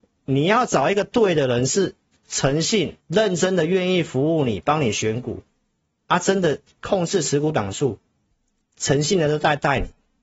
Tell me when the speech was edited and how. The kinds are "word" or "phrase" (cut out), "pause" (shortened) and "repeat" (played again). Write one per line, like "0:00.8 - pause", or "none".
0:03.0 - pause
0:05.8 - pause